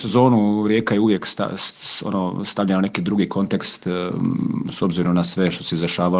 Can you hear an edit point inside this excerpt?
no; 0 cuts

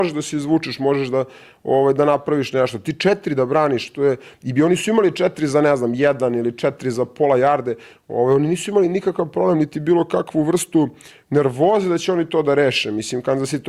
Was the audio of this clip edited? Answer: no; 0 cuts

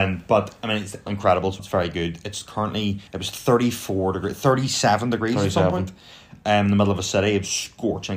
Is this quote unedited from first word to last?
no; 3 cuts; at 1.1 s, 1.6 s, 3.1 s

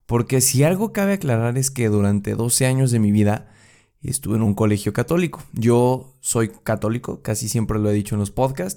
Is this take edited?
no; 0 cuts

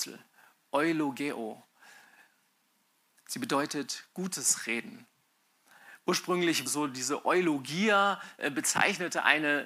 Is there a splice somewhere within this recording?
yes; 1 cut; at 6.7 s

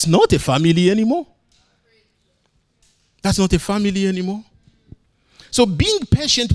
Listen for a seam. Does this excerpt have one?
no; 0 cuts

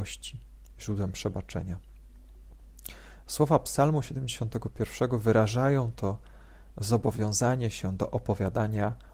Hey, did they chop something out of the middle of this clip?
no; 0 cuts

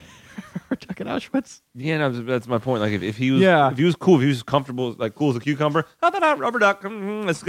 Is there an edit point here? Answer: no; 0 cuts

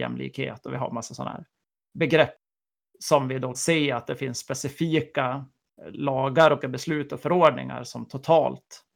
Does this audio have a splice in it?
yes; 2 cuts; at 3.5 s, 6.6 s

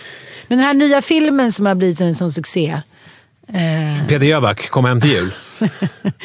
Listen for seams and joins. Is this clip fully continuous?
yes; 0 cuts

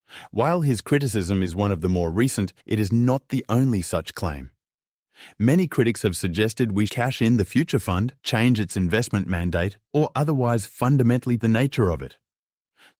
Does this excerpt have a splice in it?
yes; 5 cuts; at 2.6 s, 6.9 s, 8.2 s, 9.9 s, 11.4 s

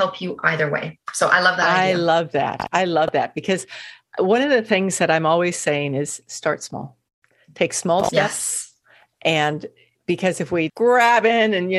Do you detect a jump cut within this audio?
yes; 1 cut; at 10.7 s

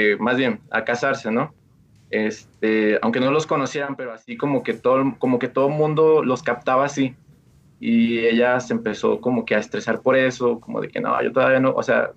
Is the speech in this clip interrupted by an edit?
no; 0 cuts

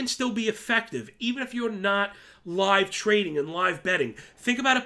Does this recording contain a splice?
no; 0 cuts

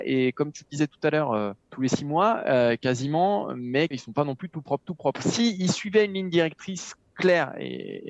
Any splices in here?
yes; 2 cuts; at 1.6 s, 3.9 s

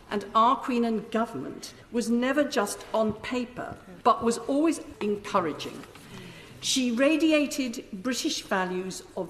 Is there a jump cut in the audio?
yes; 3 cuts; at 1.8 s, 4.0 s, 4.9 s

